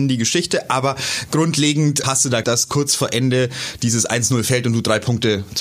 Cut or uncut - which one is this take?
cut